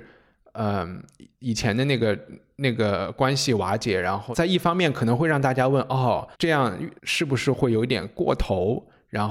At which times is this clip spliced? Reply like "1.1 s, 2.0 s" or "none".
6.3 s, 7.0 s